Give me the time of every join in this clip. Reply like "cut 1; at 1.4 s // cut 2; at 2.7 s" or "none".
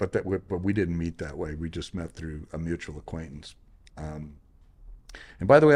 none